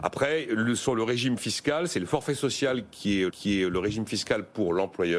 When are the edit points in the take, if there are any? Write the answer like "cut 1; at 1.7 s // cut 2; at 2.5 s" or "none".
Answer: cut 1; at 3.3 s